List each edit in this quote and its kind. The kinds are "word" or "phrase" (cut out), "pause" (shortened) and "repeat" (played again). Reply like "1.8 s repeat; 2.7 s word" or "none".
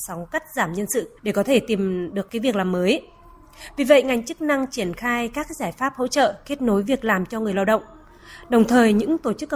1.2 s pause; 2.3 s word

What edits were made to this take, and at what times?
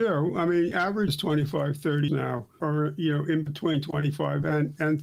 1.1 s word; 2.1 s word; 2.6 s word

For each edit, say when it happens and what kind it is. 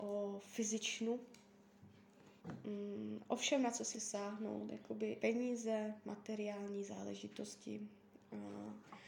2.4 s pause; 3.9 s word; 5.2 s phrase

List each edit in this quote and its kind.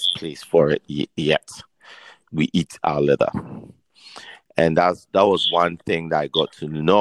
2.2 s word

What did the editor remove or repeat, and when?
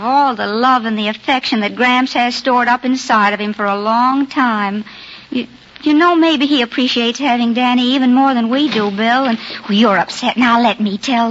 5.2 s pause

